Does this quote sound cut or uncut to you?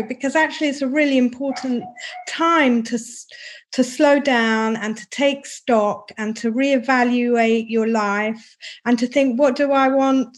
uncut